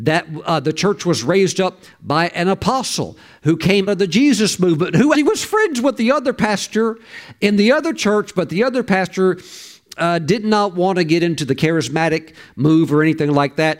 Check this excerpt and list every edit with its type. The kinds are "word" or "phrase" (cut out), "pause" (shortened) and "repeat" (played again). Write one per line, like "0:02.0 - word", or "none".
0:03.9 - word
0:05.1 - word